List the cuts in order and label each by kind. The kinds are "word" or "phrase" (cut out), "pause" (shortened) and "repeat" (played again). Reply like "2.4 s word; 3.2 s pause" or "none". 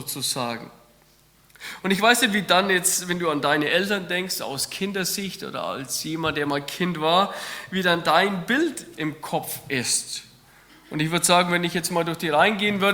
none